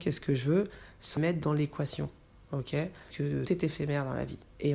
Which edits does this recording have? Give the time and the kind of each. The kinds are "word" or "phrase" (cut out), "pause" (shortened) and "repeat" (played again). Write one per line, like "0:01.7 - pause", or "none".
0:01.2 - word
0:03.1 - word
0:03.5 - word